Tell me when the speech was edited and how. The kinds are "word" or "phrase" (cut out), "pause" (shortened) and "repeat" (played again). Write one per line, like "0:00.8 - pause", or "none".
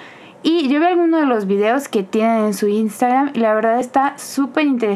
none